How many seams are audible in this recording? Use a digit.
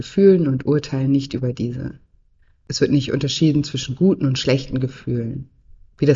0